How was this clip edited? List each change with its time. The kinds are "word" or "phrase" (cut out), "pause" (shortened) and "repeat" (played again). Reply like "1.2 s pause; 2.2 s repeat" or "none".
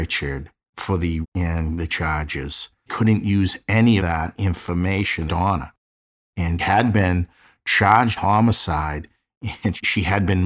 1.2 s word; 1.9 s word; 2.9 s word; 4.0 s word; 5.3 s word; 6.6 s word; 8.2 s word